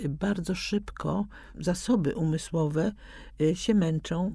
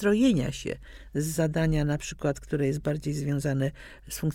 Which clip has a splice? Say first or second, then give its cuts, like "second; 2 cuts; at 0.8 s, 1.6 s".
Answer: first; 1 cut; at 1.5 s